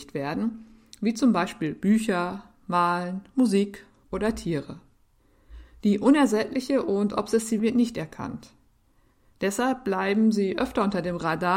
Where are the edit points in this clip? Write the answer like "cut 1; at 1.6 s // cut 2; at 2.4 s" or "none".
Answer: cut 1; at 7.6 s